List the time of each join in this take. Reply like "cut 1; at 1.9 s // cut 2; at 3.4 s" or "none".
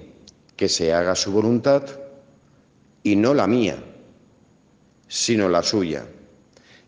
none